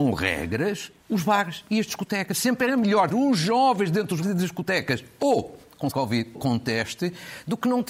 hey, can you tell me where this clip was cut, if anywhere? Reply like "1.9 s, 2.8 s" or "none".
1.0 s, 3.1 s, 4.2 s, 5.9 s, 6.3 s